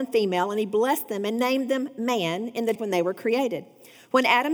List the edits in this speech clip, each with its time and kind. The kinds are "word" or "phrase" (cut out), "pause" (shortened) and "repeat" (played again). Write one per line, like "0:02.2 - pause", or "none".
0:02.8 - word